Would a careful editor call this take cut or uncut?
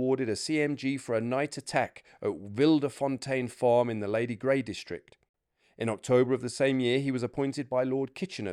uncut